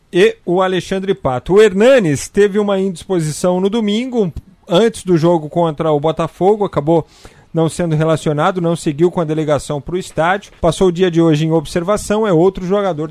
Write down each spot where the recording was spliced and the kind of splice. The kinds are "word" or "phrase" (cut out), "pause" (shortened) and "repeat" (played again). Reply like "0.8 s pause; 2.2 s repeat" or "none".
10.6 s pause